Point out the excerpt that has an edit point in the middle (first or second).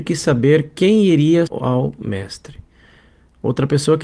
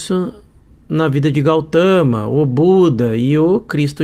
first